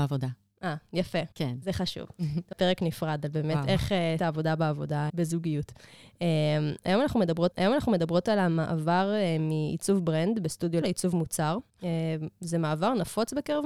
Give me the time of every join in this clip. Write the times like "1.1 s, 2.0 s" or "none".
1.3 s, 2.5 s, 4.2 s, 5.1 s, 7.5 s, 10.8 s, 11.7 s